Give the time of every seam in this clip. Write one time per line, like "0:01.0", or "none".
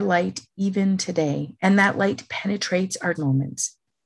0:03.1